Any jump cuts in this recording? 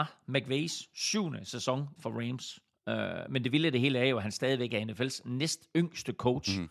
yes; 1 cut; at 2.0 s

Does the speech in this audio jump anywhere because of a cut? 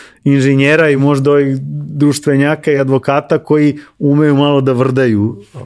no; 0 cuts

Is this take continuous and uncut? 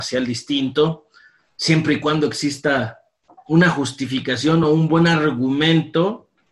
yes; 0 cuts

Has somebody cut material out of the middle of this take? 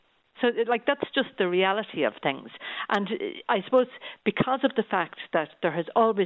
no; 0 cuts

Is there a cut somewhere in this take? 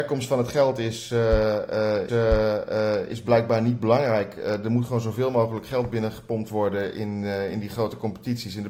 yes; 1 cut; at 2.1 s

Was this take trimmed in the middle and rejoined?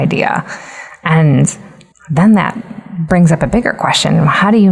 no; 0 cuts

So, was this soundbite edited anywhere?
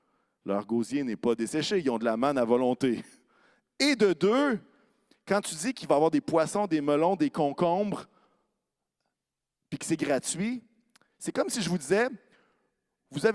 no; 0 cuts

